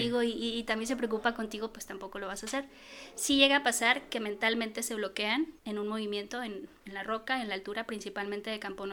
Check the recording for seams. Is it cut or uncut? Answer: cut